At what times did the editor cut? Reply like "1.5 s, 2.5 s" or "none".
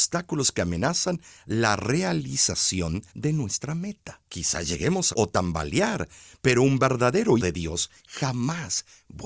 3.1 s, 4.2 s, 5.1 s, 7.4 s, 8.0 s